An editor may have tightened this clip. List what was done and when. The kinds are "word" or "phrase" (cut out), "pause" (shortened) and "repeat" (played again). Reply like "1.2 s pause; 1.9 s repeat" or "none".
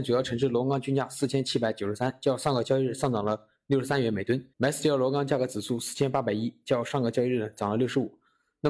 4.5 s pause